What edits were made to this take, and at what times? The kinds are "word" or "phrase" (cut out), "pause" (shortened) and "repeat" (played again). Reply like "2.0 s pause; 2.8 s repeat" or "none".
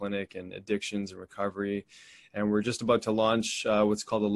none